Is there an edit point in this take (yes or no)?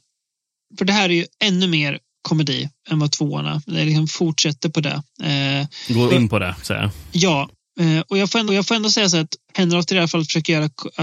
yes